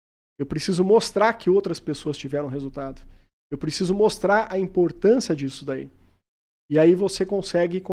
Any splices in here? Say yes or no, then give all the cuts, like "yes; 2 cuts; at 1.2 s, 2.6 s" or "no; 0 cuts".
no; 0 cuts